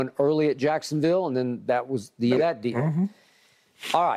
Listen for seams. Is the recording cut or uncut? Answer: cut